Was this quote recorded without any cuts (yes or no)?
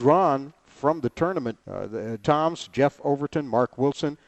no